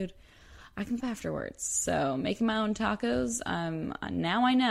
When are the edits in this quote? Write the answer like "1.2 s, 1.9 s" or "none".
1.0 s